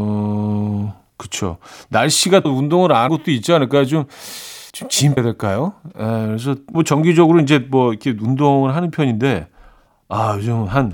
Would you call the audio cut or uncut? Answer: cut